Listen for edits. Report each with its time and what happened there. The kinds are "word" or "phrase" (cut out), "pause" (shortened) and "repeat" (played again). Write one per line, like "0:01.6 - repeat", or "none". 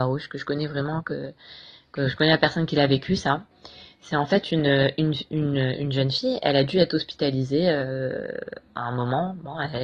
none